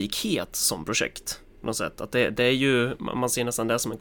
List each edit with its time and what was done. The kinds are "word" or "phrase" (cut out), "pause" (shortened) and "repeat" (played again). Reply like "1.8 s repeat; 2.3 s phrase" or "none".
1.5 s pause